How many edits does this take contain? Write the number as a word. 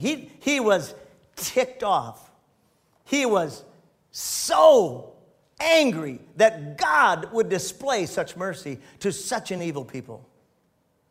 zero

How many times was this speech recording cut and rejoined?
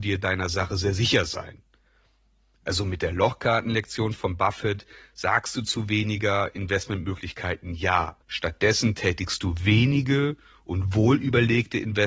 one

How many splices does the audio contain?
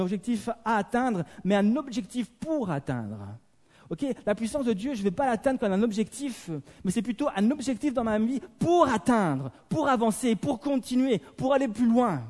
zero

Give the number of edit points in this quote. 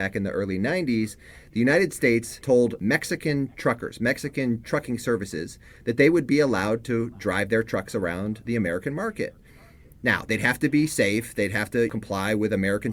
zero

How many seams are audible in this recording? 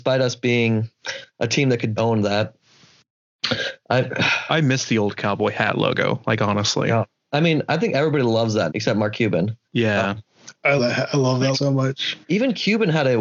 six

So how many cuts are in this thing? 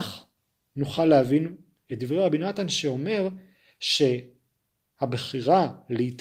zero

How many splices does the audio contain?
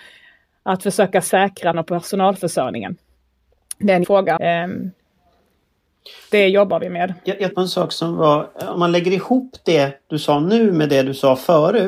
five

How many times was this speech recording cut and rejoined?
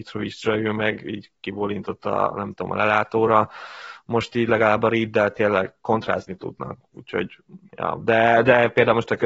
one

